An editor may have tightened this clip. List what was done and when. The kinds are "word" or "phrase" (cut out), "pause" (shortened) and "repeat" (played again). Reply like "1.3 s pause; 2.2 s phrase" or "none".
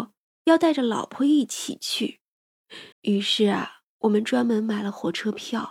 2.9 s pause